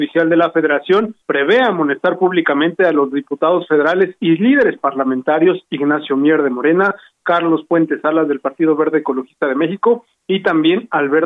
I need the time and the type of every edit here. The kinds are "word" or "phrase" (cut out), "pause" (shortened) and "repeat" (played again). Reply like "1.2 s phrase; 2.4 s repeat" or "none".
1.2 s pause